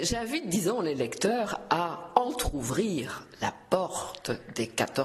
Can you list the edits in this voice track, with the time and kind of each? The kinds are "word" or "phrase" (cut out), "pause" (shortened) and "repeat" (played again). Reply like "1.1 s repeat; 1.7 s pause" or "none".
none

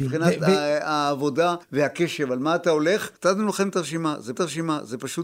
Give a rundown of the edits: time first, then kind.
1.6 s pause; 3.2 s pause; 4.4 s repeat

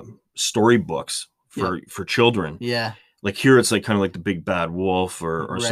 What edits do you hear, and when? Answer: none

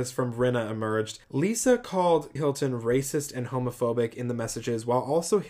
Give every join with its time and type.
1.2 s pause; 2.4 s word

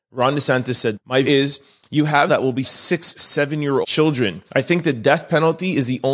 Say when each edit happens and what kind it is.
0.9 s word; 1.2 s word; 2.3 s phrase; 2.6 s phrase; 3.8 s word; 4.5 s pause

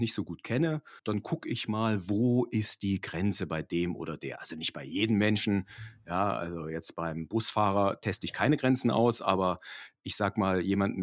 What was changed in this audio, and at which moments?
1.0 s pause

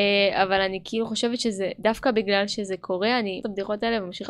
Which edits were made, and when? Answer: 3.4 s phrase

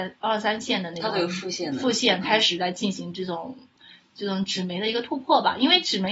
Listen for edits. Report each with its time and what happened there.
none

